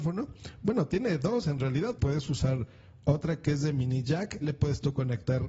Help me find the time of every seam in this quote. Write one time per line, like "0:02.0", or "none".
0:02.0
0:04.4